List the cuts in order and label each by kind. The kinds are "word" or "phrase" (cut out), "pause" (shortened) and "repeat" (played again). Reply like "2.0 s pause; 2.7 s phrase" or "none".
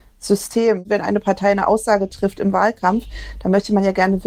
none